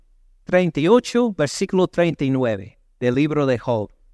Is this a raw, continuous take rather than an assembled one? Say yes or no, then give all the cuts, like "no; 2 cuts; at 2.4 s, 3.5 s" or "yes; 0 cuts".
yes; 0 cuts